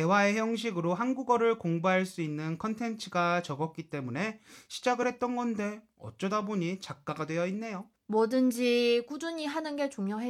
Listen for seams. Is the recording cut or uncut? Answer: uncut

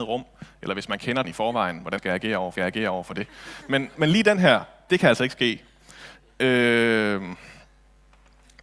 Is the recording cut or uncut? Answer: cut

